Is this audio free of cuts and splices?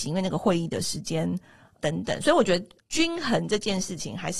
no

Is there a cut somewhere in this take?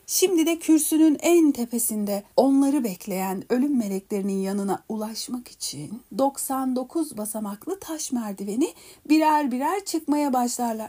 yes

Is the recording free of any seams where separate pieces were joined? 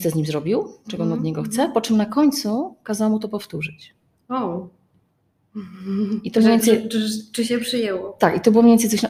yes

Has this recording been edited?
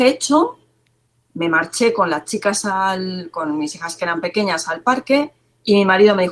no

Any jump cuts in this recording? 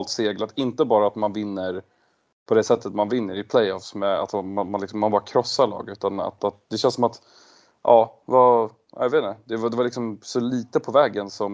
yes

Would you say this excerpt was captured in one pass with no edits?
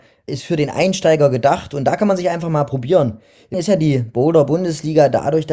no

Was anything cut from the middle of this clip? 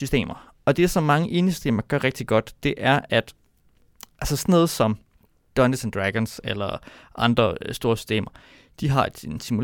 no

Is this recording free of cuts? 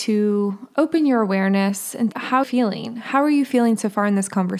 no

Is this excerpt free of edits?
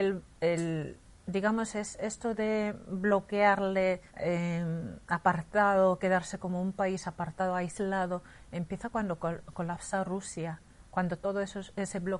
no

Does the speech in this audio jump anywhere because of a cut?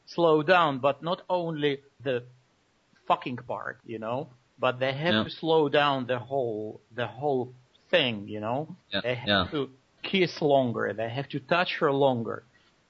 yes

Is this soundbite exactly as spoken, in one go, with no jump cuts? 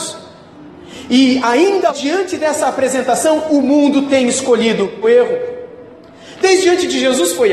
no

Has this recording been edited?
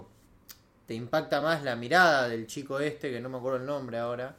no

